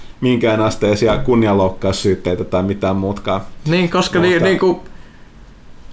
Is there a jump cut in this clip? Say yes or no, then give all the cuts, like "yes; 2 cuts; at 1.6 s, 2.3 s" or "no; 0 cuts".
no; 0 cuts